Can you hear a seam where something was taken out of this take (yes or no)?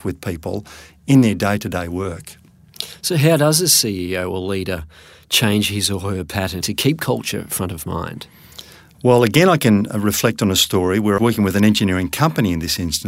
yes